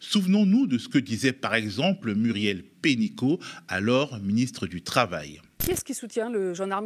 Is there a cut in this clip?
no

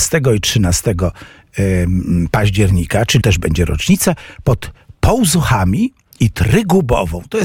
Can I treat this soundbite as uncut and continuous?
no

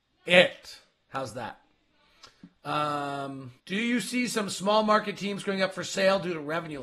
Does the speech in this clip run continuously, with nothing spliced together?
no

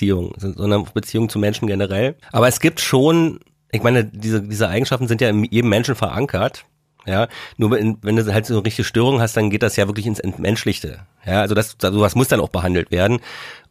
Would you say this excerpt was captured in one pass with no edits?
yes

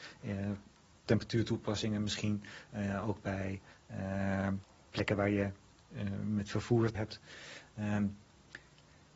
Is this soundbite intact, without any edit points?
no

